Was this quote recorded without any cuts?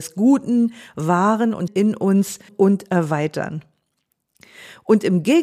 no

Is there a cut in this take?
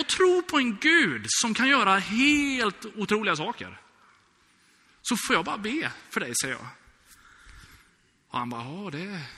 no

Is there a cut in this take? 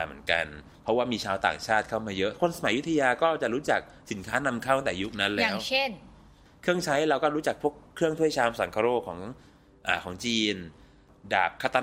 no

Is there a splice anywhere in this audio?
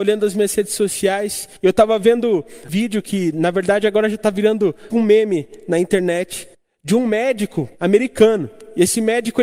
yes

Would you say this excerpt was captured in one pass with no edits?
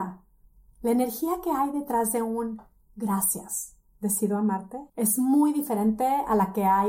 no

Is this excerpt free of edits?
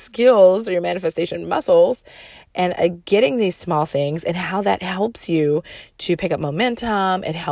yes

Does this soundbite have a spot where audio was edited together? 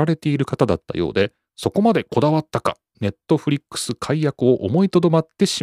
yes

